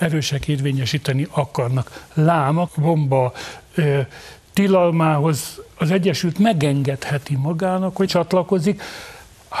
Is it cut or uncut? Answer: cut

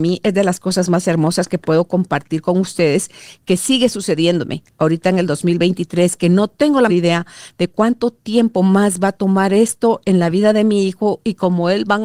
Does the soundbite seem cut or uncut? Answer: cut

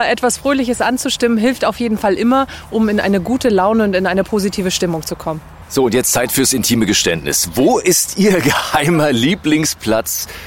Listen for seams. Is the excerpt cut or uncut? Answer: uncut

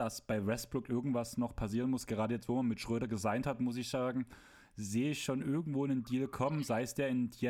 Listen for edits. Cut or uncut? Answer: uncut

